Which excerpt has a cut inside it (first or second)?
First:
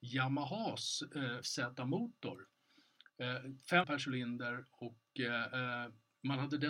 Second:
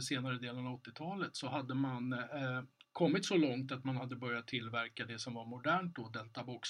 first